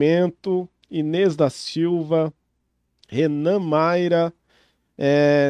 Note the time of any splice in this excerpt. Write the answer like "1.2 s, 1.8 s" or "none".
none